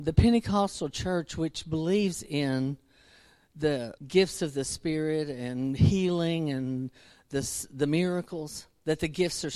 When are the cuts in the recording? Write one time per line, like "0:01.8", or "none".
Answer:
0:04.0

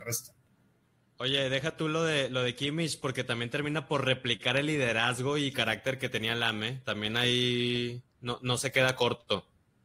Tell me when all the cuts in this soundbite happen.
none

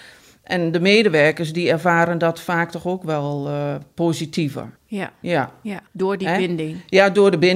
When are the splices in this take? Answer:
0:04.8
0:05.9

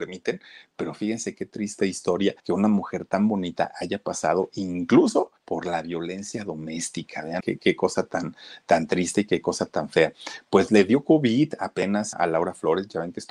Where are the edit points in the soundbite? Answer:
0:02.4
0:05.4
0:07.4
0:12.1

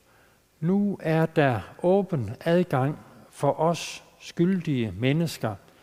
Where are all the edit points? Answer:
none

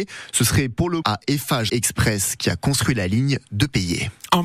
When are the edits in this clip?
0:01.0
0:01.7

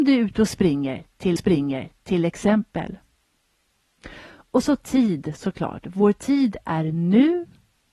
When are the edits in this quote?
0:01.4

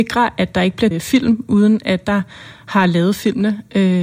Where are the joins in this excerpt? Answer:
0:00.9
0:02.0

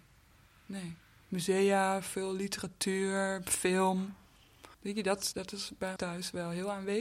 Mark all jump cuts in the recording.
0:04.7
0:05.3
0:06.0

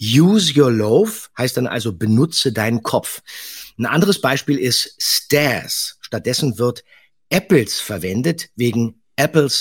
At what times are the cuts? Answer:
none

